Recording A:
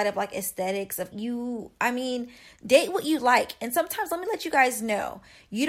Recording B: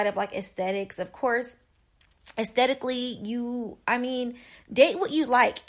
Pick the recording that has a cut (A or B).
A